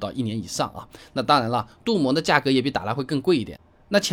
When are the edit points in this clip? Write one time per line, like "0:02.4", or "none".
none